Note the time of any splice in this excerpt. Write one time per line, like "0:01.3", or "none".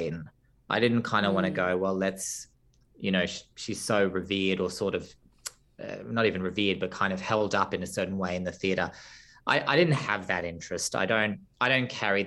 none